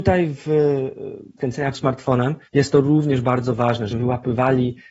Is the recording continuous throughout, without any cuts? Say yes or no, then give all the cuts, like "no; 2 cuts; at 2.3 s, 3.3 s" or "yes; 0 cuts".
no; 4 cuts; at 1.4 s, 1.7 s, 2.4 s, 3.9 s